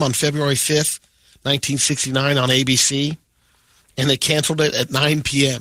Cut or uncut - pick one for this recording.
uncut